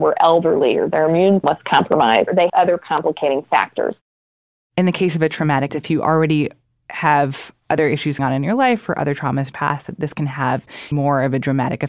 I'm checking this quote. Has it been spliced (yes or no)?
yes